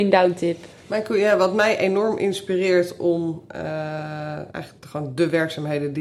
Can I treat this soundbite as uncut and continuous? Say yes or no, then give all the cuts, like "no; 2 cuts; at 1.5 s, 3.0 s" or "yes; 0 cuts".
yes; 0 cuts